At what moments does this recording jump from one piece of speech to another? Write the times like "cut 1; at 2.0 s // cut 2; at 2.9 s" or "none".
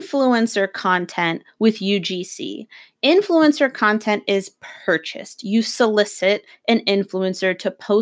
none